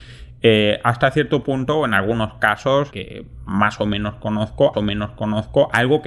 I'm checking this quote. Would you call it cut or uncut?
cut